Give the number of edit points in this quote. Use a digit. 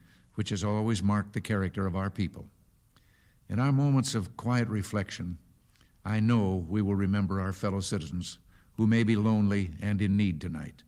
0